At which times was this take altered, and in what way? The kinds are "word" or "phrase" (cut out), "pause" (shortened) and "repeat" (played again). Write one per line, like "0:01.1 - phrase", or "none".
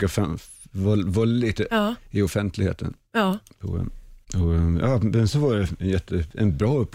0:01.7 - word
0:04.2 - pause
0:05.3 - word